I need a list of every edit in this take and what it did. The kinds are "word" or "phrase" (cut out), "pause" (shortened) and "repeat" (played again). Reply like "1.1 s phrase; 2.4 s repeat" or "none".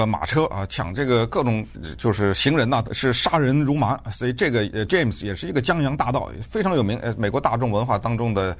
1.7 s phrase; 2.8 s phrase; 4.9 s word

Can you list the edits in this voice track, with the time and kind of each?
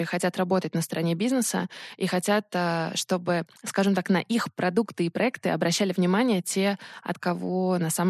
3.6 s pause

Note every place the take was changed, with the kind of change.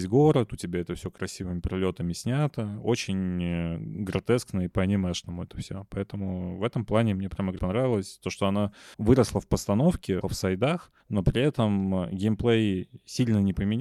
7.6 s word; 8.9 s pause; 10.2 s word; 11.0 s pause

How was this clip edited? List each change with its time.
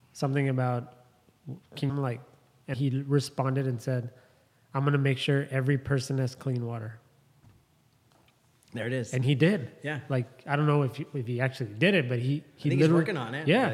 1.9 s phrase; 2.7 s word

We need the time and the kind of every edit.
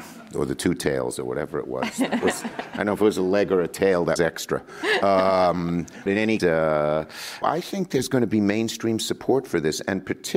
4.2 s word; 6.1 s word; 6.4 s word; 7.4 s word

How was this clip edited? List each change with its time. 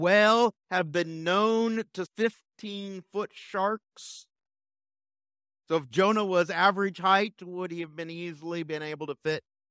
2.1 s word

